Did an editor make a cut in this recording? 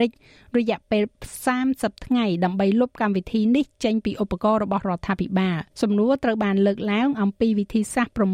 yes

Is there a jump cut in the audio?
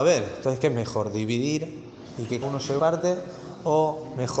yes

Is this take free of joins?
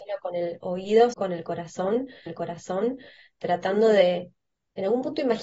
no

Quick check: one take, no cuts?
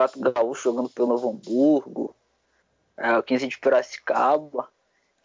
yes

